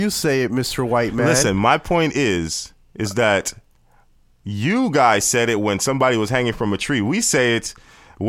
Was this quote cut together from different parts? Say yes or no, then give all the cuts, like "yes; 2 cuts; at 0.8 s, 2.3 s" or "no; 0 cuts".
no; 0 cuts